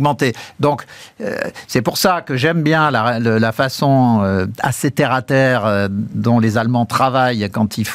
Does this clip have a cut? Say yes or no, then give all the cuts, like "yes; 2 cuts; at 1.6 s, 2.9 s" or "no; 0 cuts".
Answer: no; 0 cuts